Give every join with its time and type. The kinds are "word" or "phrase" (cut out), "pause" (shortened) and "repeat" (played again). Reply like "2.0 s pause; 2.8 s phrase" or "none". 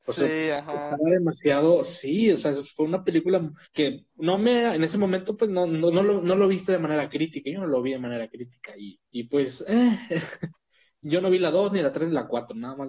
3.6 s pause; 9.0 s pause